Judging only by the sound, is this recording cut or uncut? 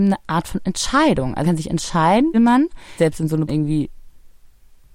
cut